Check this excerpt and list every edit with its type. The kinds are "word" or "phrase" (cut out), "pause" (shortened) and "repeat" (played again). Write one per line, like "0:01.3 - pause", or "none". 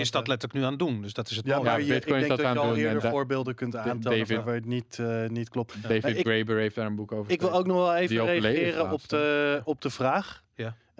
none

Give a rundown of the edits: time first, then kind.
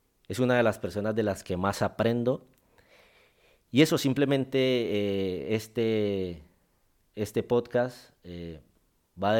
none

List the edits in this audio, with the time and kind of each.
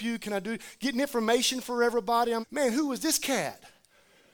0:02.4 - word

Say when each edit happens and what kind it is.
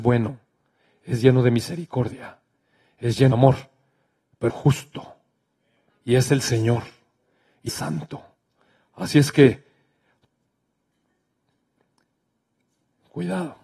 0:03.3 - word
0:04.5 - word
0:07.7 - word

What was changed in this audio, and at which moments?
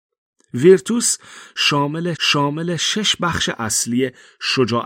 0:02.1 - repeat

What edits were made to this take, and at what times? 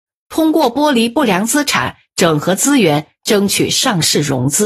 none

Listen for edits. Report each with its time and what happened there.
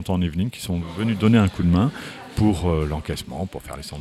none

